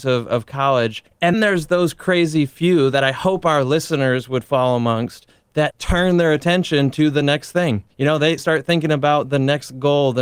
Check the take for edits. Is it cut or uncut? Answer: cut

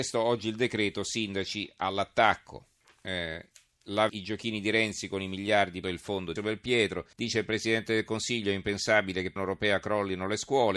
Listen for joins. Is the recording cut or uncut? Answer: cut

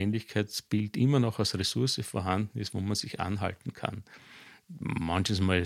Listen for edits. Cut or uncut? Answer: uncut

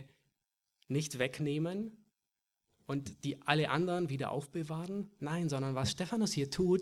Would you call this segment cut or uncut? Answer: uncut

